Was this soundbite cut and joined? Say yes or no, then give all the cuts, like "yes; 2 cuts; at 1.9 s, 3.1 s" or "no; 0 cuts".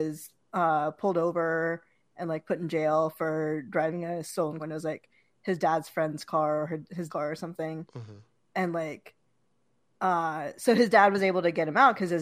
yes; 2 cuts; at 4.6 s, 7.1 s